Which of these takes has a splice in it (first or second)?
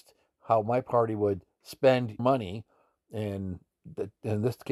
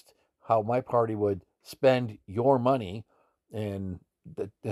first